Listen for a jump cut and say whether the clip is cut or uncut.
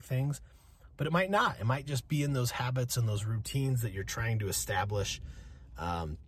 uncut